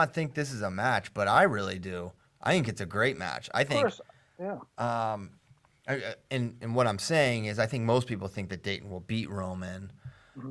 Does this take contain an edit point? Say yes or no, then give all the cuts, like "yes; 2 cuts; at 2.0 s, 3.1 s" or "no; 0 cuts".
no; 0 cuts